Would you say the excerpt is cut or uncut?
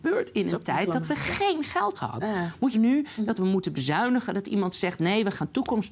cut